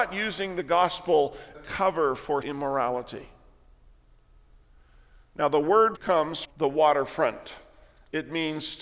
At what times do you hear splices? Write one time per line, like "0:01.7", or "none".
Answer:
0:01.5
0:02.4
0:05.9
0:06.4